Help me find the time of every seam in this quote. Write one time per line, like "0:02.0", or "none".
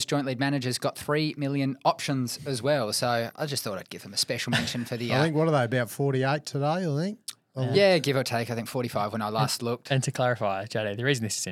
none